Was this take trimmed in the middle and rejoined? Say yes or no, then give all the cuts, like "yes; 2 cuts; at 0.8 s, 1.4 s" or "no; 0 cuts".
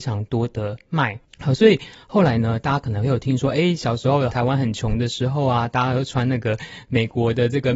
no; 0 cuts